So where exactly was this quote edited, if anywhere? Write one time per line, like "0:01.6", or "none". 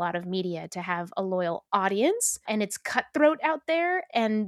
0:02.5